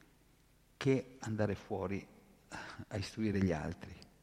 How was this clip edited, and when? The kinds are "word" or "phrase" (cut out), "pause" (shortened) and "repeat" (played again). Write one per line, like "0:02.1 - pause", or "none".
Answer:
none